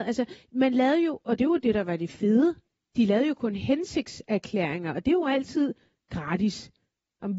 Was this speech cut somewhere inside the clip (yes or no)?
no